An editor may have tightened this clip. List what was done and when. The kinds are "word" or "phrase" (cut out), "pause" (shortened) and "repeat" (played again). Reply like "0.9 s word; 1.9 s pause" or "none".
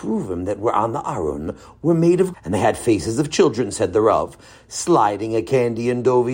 2.3 s word